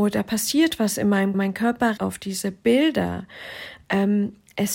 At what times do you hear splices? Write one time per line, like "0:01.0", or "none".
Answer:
0:01.3
0:02.0